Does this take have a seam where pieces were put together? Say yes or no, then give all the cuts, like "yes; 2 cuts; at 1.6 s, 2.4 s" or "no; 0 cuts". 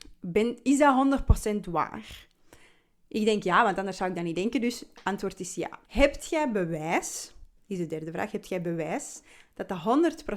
yes; 1 cut; at 5.9 s